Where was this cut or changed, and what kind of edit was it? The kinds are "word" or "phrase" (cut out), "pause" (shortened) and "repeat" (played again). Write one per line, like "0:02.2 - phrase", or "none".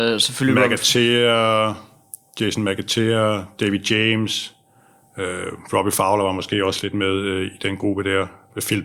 none